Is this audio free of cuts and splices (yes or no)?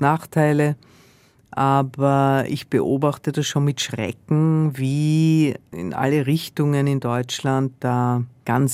yes